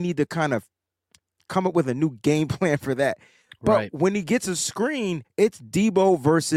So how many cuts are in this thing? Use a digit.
0